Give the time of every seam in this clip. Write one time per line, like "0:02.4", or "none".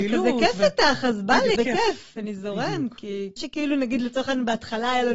0:01.5
0:03.4